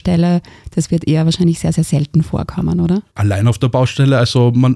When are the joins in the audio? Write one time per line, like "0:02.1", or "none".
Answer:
0:03.1

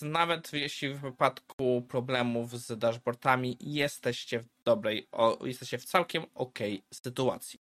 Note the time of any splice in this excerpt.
none

